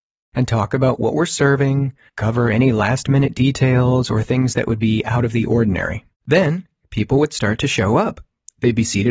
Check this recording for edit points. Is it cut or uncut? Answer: cut